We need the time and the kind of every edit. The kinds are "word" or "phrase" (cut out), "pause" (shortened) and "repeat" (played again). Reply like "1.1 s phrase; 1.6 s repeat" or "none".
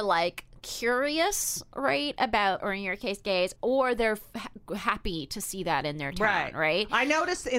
2.6 s word; 3.6 s word